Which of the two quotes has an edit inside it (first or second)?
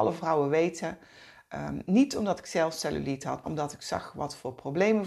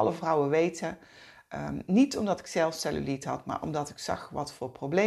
first